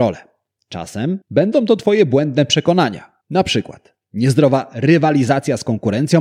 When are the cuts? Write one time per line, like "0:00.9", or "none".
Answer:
0:01.2
0:03.2